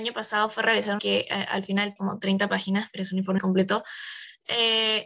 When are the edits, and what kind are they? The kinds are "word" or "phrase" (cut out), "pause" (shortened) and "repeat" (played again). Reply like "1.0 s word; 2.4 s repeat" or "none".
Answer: 1.0 s word; 2.0 s word; 3.4 s word